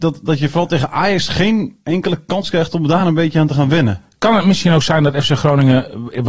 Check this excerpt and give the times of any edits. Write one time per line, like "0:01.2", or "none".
none